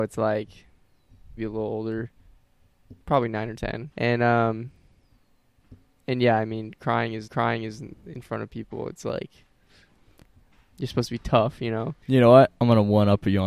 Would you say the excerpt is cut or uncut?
cut